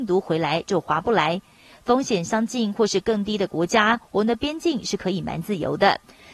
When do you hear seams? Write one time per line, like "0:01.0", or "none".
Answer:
none